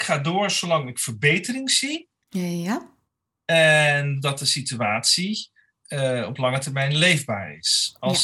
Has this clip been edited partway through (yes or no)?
no